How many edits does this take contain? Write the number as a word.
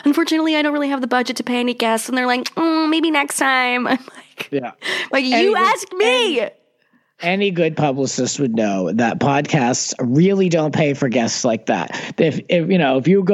zero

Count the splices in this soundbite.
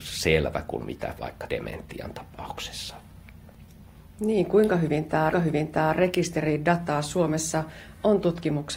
two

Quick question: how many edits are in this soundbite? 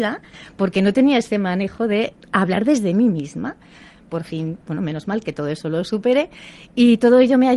zero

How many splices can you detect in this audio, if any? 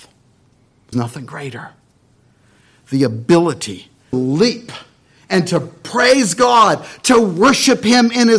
two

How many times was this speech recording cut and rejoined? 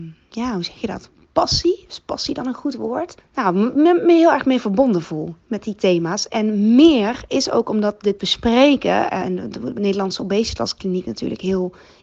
four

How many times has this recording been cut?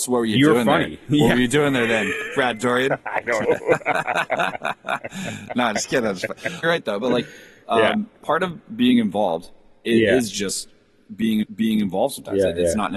three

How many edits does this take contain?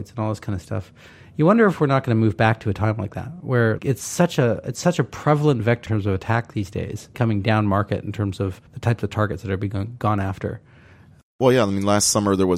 four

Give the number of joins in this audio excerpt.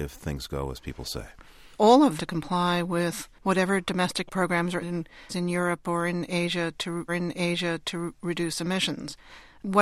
six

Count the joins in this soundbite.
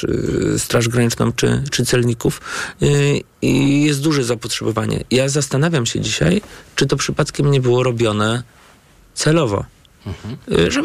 zero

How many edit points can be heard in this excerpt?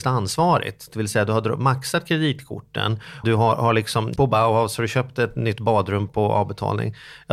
three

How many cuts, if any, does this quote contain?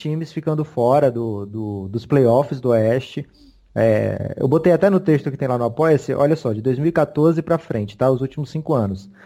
zero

